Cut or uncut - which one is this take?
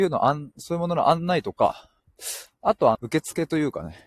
cut